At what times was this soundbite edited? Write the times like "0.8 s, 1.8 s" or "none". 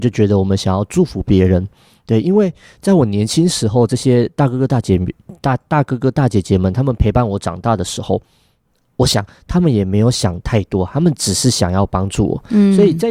none

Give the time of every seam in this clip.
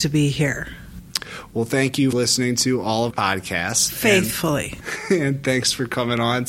2.1 s, 3.1 s

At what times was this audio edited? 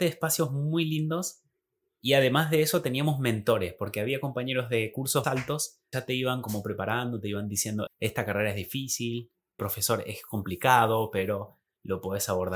5.2 s, 5.9 s, 7.9 s, 9.6 s

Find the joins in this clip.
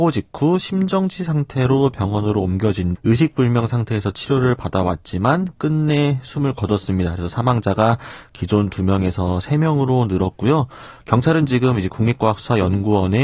2.9 s

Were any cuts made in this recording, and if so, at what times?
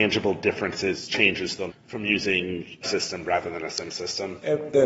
1.7 s, 2.8 s

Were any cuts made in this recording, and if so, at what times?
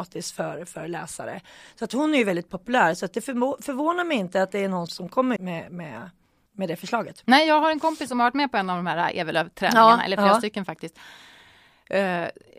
4.9 s, 5.4 s

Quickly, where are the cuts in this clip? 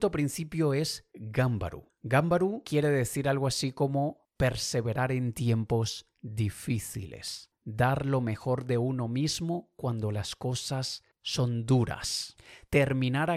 none

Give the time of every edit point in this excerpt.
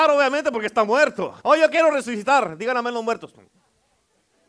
1.4 s

